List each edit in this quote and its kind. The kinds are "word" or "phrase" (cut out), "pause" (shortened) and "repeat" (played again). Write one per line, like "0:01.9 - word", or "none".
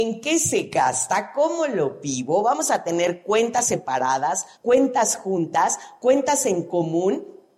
0:04.5 - pause